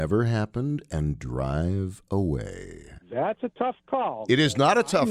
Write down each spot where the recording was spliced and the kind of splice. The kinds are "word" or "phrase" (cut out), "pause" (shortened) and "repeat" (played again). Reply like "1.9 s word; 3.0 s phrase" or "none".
3.0 s pause